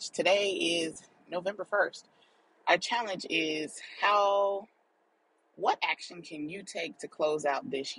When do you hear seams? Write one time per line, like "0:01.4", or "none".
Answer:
none

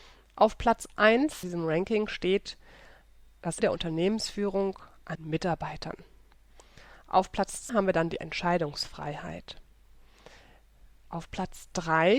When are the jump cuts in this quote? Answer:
0:01.4
0:03.6
0:05.1
0:07.7
0:08.2

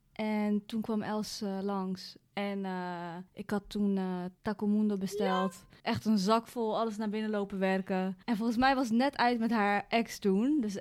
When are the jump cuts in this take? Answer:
0:02.2
0:03.3
0:04.4
0:05.8
0:08.2

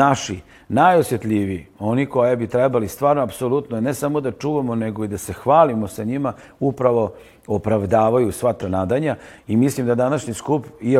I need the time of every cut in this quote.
0:08.6

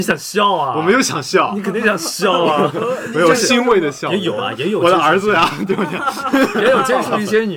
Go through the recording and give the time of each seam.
none

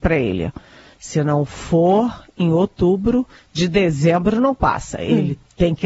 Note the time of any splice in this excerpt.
none

